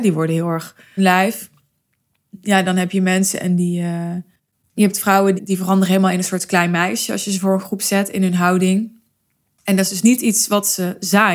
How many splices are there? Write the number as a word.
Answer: three